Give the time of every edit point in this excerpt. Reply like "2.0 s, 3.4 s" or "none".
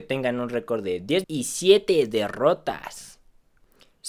1.2 s